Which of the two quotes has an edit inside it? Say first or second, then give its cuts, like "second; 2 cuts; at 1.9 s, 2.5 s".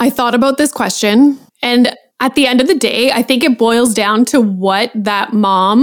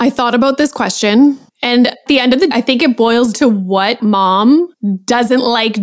second; 4 cuts; at 2.1 s, 2.5 s, 3.3 s, 4.0 s